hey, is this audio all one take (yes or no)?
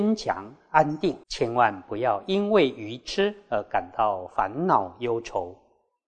no